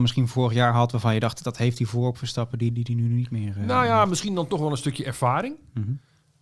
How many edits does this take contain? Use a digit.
0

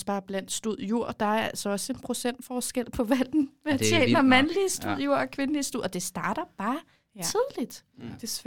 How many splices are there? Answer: 0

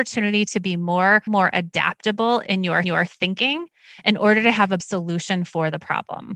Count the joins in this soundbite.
3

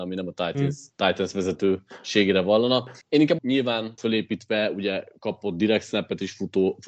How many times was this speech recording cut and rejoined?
3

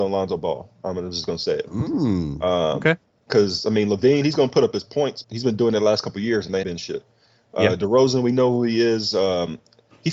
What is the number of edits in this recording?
2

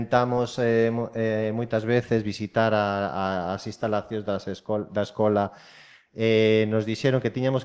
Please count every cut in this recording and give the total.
0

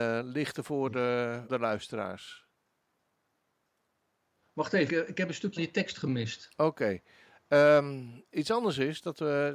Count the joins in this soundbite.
3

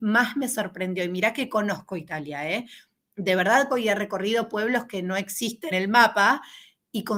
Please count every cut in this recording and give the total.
2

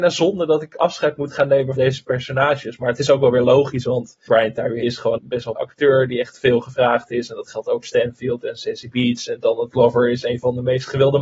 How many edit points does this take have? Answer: 6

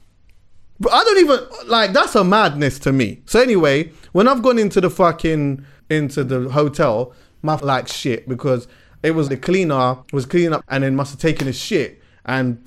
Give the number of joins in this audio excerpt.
5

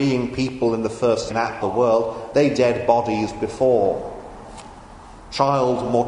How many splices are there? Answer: 3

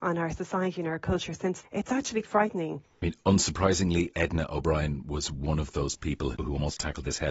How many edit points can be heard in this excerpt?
4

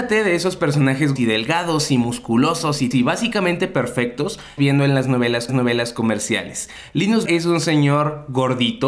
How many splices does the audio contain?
5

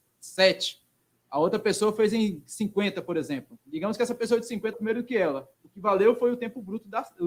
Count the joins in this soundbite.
2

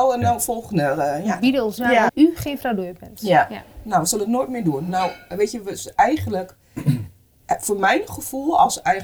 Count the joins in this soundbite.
2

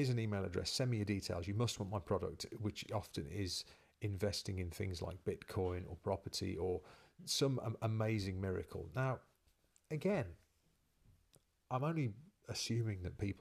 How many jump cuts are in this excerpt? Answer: 0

